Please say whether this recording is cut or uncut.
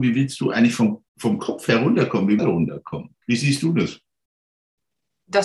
cut